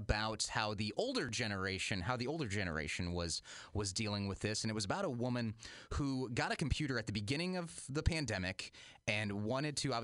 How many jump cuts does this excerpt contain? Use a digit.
0